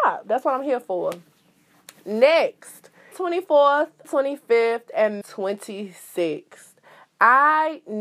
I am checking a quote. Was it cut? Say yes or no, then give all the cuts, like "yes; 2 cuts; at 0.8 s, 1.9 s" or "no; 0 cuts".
yes; 3 cuts; at 3.1 s, 4.0 s, 5.2 s